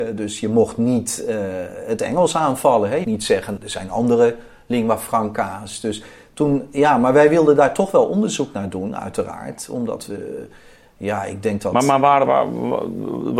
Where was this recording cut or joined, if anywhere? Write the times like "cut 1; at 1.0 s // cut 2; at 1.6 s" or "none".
cut 1; at 3.0 s // cut 2; at 3.6 s // cut 3; at 12.3 s